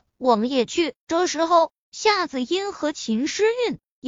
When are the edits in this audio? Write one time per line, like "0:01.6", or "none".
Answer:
0:01.0